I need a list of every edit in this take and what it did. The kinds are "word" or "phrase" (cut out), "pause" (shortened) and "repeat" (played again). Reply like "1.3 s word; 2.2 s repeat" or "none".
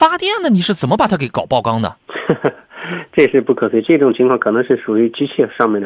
2.0 s pause